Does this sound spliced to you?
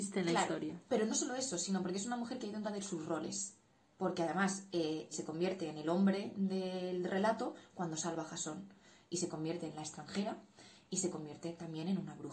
yes; 2 cuts; at 2.6 s, 5.1 s

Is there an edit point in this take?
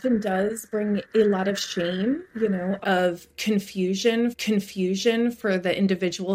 yes; 4 cuts; at 1.0 s, 2.3 s, 2.8 s, 4.3 s

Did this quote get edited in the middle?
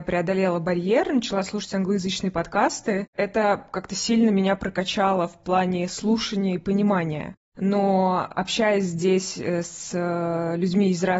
no; 0 cuts

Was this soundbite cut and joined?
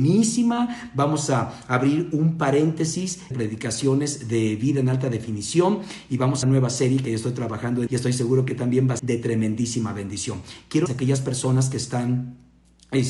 yes; 5 cuts; at 3.3 s, 6.4 s, 7.9 s, 9.0 s, 10.9 s

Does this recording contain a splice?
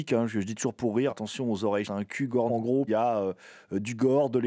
yes; 4 cuts; at 1.1 s, 1.8 s, 2.5 s, 2.9 s

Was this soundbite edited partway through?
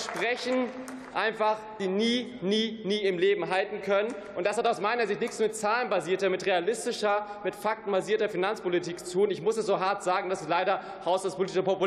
yes; 1 cut; at 1.8 s

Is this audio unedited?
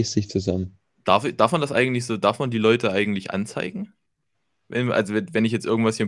yes; 0 cuts

